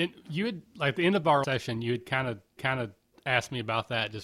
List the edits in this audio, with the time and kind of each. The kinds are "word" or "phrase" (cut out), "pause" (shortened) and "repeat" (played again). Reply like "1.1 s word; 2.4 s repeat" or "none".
1.4 s word; 2.6 s repeat